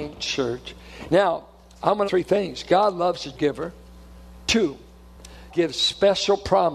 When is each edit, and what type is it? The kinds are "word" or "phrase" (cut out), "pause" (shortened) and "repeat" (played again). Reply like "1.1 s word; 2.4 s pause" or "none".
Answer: 2.1 s phrase; 3.3 s word; 5.5 s word